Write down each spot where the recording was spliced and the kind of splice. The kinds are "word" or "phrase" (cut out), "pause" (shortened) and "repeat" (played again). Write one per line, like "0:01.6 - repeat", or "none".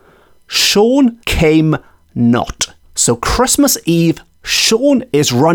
0:01.2 - pause
0:02.8 - pause